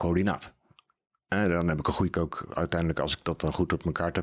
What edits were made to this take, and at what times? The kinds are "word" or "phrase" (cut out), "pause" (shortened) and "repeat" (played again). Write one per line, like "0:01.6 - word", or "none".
0:02.1 - phrase